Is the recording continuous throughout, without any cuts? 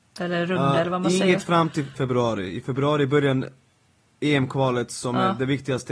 no; 1 cut; at 1.9 s

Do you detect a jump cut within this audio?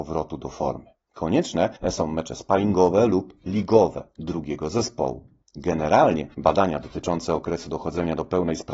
no; 0 cuts

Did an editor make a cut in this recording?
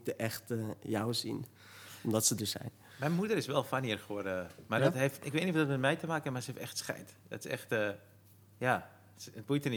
no; 0 cuts

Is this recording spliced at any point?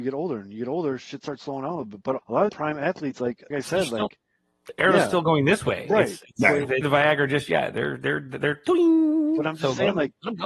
yes; 4 cuts; at 2.2 s, 2.5 s, 3.5 s, 6.8 s

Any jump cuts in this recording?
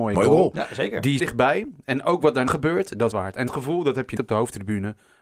yes; 5 cuts; at 1.2 s, 2.5 s, 3.1 s, 3.5 s, 4.2 s

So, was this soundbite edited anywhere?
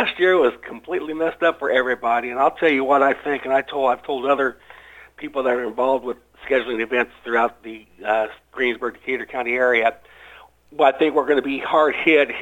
no; 0 cuts

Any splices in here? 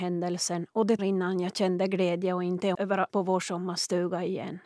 yes; 3 cuts; at 1.0 s, 2.7 s, 3.1 s

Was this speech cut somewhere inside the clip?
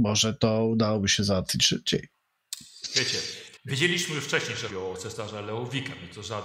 yes; 2 cuts; at 3.6 s, 4.7 s

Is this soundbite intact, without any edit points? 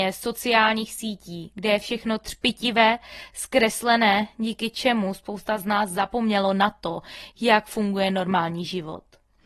yes; 0 cuts

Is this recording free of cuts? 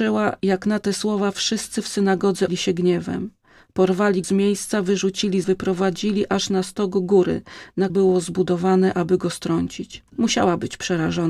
no; 5 cuts; at 2.5 s, 4.2 s, 5.4 s, 7.9 s, 10.1 s

